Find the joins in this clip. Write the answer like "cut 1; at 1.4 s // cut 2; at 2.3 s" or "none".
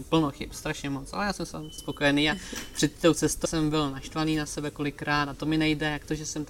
cut 1; at 1.8 s // cut 2; at 3.4 s